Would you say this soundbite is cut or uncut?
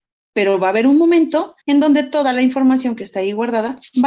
cut